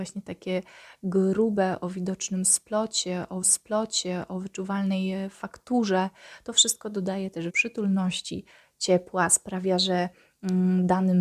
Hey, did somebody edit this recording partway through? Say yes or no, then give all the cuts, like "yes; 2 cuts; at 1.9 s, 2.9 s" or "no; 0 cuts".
yes; 2 cuts; at 3.4 s, 7.5 s